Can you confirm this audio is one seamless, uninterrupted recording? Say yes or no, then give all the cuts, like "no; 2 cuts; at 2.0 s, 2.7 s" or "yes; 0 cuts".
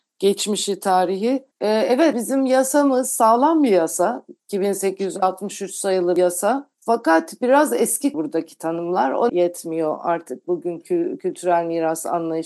no; 6 cuts; at 1.5 s, 2.1 s, 4.4 s, 6.7 s, 8.1 s, 9.3 s